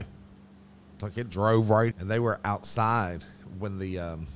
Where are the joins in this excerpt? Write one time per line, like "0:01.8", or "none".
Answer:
0:01.0
0:01.9